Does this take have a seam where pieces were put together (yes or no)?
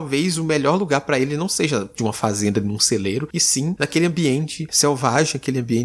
yes